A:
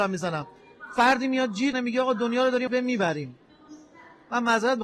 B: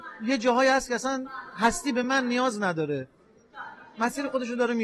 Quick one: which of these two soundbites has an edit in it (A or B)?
A